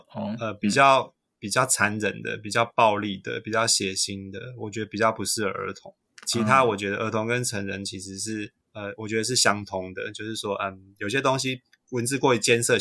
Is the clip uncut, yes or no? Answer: yes